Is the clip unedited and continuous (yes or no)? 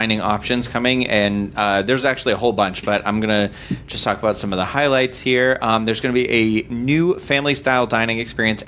yes